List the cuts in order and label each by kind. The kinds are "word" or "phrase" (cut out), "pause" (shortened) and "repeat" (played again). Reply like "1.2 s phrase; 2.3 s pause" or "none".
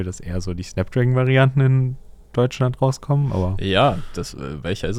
none